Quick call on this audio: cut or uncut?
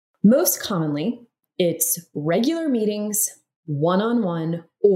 uncut